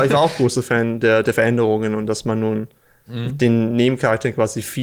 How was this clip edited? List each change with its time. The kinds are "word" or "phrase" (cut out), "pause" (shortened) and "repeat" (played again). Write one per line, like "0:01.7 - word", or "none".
none